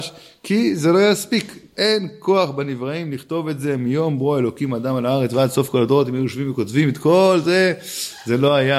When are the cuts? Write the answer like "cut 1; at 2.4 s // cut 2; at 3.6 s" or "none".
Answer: none